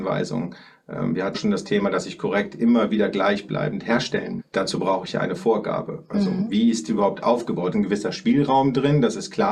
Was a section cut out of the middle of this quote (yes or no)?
yes